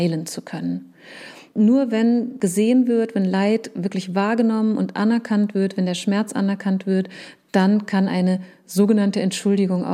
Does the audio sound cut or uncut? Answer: uncut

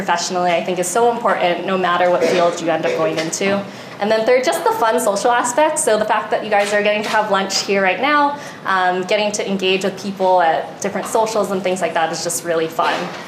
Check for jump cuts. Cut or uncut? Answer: uncut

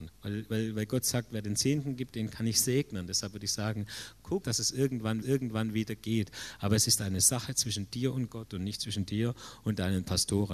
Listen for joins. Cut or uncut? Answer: cut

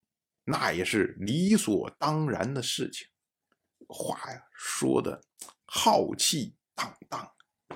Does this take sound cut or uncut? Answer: uncut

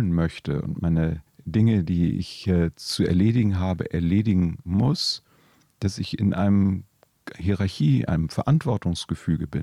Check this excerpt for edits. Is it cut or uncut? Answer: cut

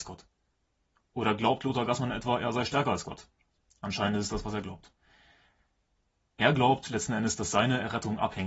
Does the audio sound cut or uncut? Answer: uncut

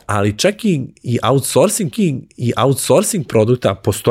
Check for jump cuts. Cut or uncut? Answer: cut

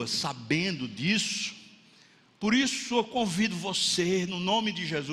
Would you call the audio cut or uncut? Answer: uncut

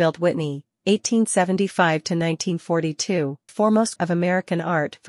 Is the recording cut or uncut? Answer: cut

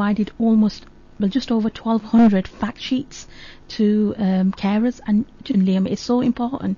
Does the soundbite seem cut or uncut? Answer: cut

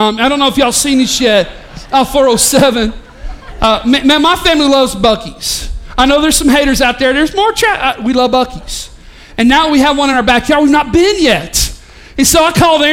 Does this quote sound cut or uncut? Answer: uncut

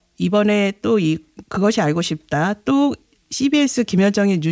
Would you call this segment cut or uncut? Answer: uncut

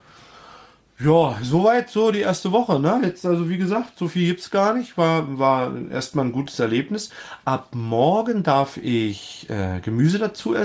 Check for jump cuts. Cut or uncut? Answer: uncut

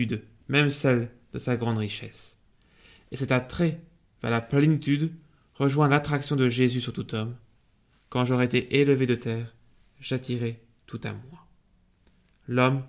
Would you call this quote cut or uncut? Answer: uncut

